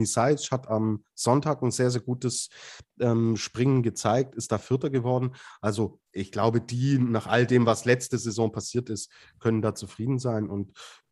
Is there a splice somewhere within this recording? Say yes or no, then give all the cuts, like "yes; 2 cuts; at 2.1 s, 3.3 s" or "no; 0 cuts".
yes; 1 cut; at 6.1 s